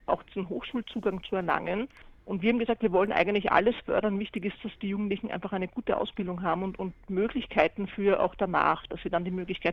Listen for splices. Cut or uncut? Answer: uncut